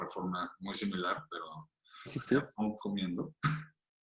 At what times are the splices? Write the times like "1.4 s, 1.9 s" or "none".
2.1 s, 2.8 s